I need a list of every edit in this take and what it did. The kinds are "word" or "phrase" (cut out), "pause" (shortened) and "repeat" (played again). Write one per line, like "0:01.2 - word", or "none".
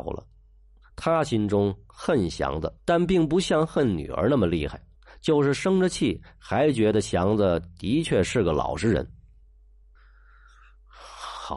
0:02.8 - pause
0:04.9 - pause